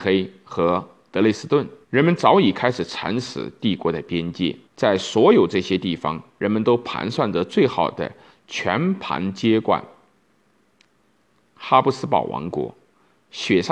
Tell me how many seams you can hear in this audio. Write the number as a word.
two